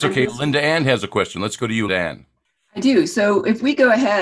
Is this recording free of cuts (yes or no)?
no